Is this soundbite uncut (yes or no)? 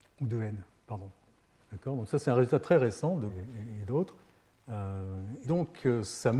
no